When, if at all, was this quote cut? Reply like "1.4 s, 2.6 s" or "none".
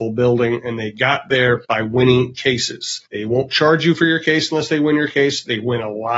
1.6 s, 3.1 s